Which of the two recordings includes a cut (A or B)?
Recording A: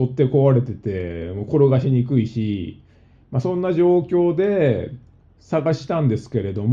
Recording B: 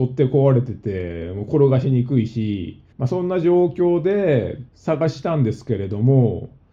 B